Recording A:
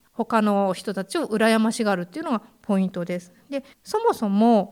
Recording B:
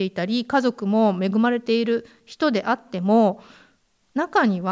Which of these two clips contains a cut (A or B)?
A